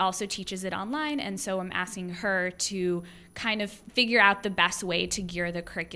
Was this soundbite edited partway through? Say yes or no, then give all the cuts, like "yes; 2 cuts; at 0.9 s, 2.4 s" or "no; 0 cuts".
no; 0 cuts